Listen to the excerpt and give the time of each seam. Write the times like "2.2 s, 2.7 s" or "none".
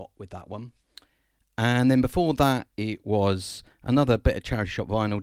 none